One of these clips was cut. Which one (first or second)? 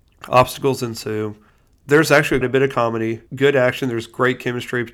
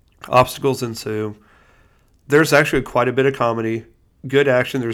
first